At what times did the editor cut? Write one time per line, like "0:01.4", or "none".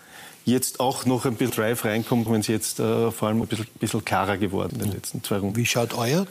0:01.5
0:02.3
0:03.4
0:04.7